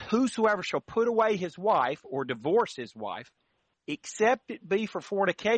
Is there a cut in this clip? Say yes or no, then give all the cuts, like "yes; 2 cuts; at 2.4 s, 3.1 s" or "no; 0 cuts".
no; 0 cuts